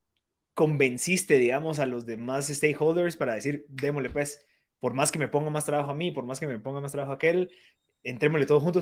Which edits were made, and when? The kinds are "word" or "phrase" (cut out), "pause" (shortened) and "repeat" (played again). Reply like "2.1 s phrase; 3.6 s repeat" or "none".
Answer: none